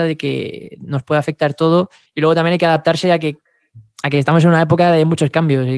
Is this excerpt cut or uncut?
cut